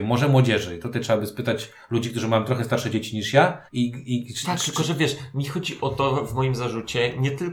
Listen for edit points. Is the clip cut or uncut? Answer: cut